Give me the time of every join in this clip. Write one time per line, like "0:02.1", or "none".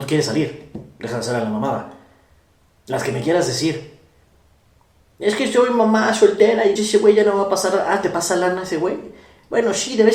0:06.8